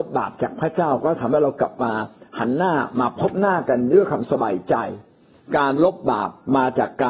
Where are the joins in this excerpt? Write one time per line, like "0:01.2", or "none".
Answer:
none